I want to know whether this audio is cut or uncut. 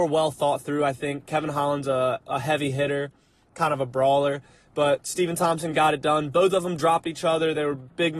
uncut